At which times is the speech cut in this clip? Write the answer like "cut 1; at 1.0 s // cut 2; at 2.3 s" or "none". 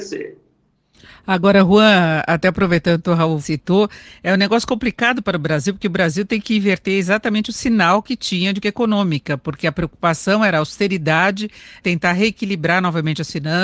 cut 1; at 3.4 s // cut 2; at 8.6 s // cut 3; at 11.8 s